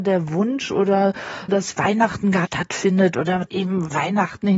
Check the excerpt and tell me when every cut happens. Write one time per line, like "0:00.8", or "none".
0:01.5
0:02.5
0:03.5

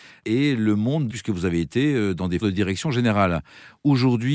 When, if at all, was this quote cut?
0:01.1
0:02.4

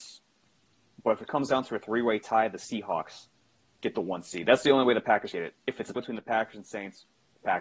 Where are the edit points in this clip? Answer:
0:03.6
0:05.3
0:06.0

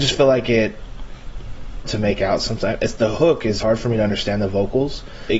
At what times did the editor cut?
0:01.8
0:03.6

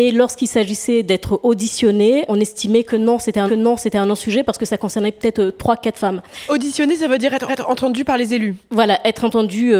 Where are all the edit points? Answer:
0:02.3
0:03.5
0:07.5

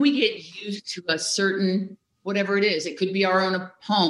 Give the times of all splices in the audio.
none

